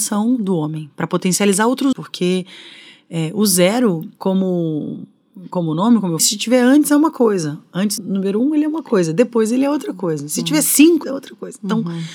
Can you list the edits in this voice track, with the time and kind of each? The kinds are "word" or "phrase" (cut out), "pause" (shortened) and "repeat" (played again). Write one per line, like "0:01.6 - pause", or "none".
0:01.9 - word
0:04.2 - pause
0:06.2 - word
0:08.0 - word
0:11.0 - word